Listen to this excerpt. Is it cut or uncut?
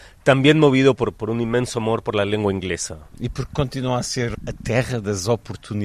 uncut